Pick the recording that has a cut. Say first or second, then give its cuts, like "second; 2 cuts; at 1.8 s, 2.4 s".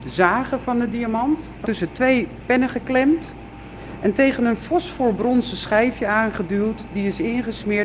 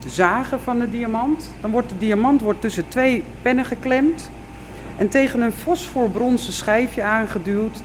first; 1 cut; at 1.6 s